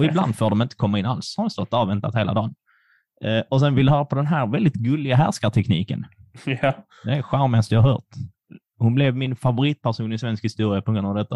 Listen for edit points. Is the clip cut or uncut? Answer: uncut